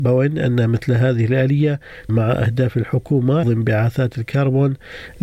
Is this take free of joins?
no; 2 cuts; at 2.1 s, 3.4 s

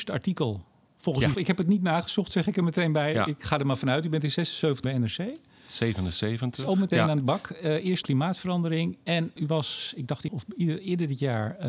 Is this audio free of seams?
no; 7 cuts; at 1.3 s, 3.4 s, 4.8 s, 6.9 s, 8.0 s, 9.4 s, 10.3 s

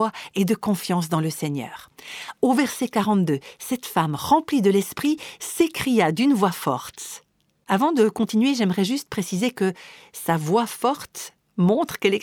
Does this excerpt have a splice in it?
no; 0 cuts

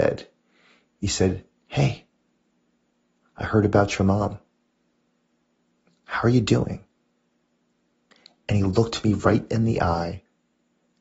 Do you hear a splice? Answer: no; 0 cuts

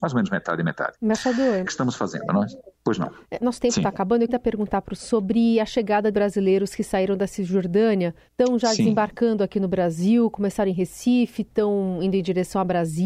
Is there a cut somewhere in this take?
yes; 6 cuts; at 1.6 s, 3.4 s, 4.3 s, 5.0 s, 6.1 s, 8.3 s

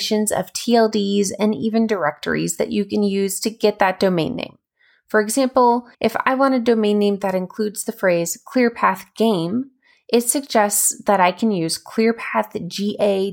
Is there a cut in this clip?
yes; 1 cut; at 5.9 s

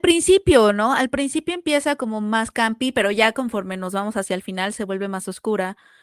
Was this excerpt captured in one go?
yes; 0 cuts

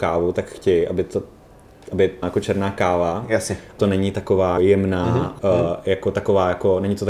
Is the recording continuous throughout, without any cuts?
no; 4 cuts; at 2.2 s, 3.8 s, 4.6 s, 5.4 s

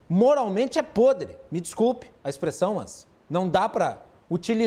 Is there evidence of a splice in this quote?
yes; 1 cut; at 2.2 s

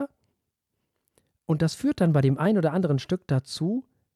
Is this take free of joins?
yes; 0 cuts

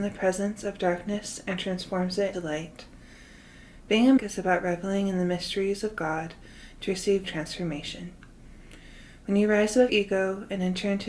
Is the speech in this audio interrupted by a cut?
yes; 4 cuts; at 2.3 s, 4.2 s, 7.2 s, 9.9 s

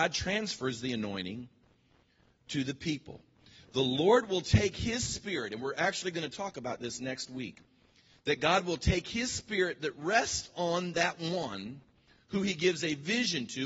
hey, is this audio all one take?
yes; 0 cuts

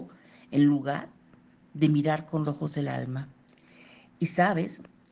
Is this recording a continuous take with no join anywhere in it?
no; 1 cut; at 2.4 s

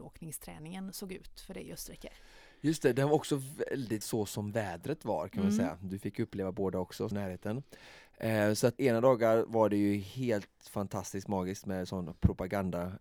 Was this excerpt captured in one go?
no; 3 cuts; at 4.0 s, 7.1 s, 8.8 s

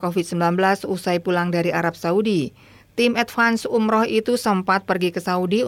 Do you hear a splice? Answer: no; 0 cuts

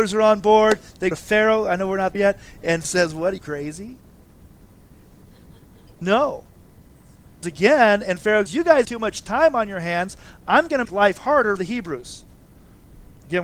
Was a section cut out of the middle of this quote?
yes; 9 cuts; at 1.1 s, 2.1 s, 2.8 s, 3.4 s, 7.4 s, 8.5 s, 8.8 s, 10.8 s, 11.6 s

